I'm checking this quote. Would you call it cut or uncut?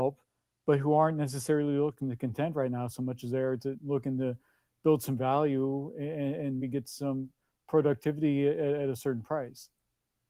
cut